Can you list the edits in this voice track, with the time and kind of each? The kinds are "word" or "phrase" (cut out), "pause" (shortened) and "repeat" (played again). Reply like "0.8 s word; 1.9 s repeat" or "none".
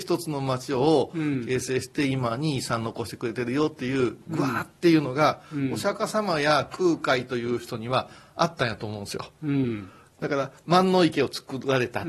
none